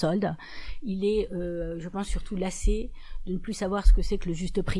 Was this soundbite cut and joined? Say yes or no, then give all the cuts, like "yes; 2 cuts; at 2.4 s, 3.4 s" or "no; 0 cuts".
no; 0 cuts